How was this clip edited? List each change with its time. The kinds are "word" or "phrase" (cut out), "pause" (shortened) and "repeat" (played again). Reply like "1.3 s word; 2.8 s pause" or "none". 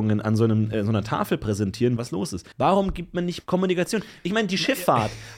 2.0 s phrase; 2.5 s pause; 3.4 s word